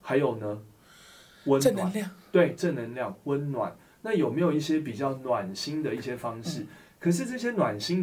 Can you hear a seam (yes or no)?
no